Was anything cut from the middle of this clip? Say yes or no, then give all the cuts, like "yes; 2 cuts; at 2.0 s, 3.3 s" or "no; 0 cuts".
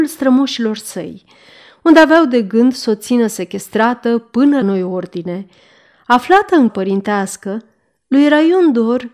yes; 2 cuts; at 4.6 s, 6.7 s